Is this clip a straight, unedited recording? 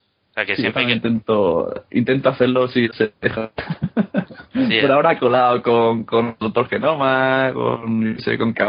no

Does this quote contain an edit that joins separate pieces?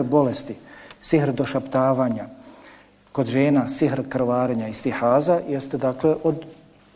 no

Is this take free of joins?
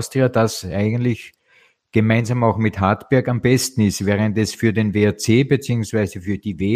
yes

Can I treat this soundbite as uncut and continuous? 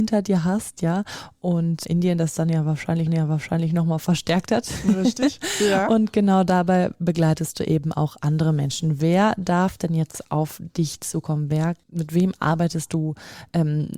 no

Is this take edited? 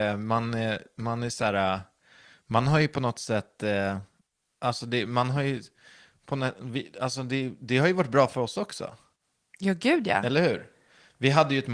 no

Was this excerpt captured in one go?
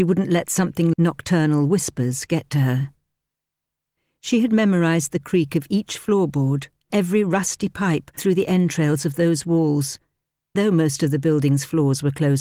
no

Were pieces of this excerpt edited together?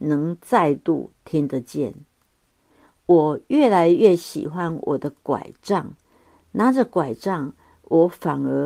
no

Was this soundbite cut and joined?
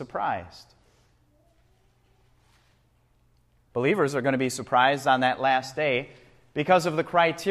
no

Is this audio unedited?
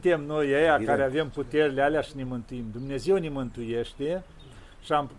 yes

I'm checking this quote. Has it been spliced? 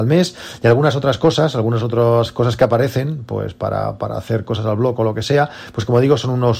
no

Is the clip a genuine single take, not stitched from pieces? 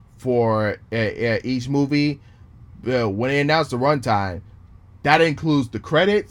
yes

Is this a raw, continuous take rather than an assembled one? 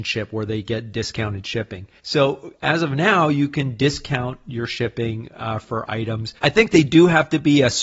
no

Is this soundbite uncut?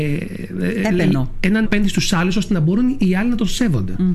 no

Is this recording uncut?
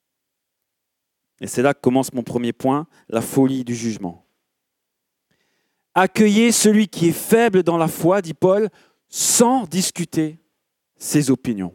yes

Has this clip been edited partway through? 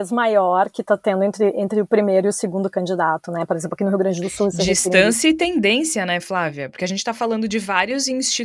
no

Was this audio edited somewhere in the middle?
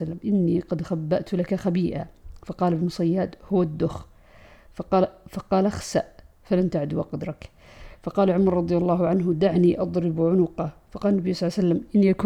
no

